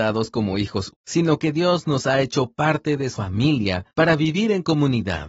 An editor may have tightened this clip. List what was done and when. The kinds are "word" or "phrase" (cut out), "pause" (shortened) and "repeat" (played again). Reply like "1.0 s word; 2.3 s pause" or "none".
0.9 s word; 3.1 s word